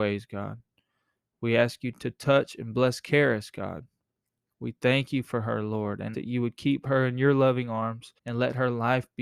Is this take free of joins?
no; 2 cuts; at 6.1 s, 8.2 s

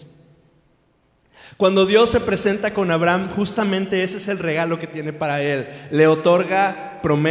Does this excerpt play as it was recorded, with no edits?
yes; 0 cuts

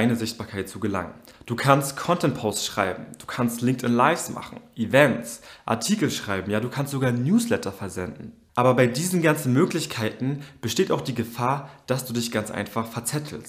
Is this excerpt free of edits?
yes; 0 cuts

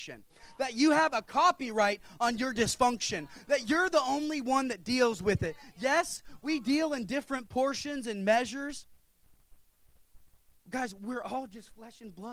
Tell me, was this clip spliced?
no; 0 cuts

